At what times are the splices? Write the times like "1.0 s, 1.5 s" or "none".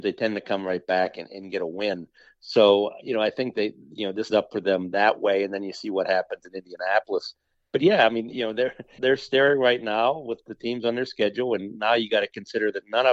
4.3 s, 9.0 s